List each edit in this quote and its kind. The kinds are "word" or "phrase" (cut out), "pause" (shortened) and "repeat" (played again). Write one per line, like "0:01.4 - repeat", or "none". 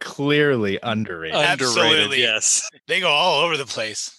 0:02.8 - pause